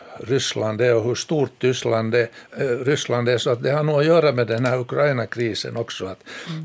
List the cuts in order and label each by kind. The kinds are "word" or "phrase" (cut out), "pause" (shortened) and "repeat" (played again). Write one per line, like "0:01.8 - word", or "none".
0:02.5 - pause